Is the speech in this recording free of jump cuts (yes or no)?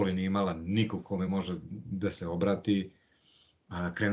yes